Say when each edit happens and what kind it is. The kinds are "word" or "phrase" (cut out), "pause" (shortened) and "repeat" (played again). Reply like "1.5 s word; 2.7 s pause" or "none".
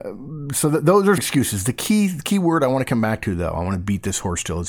1.2 s word